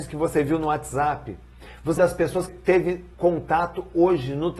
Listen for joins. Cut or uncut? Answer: cut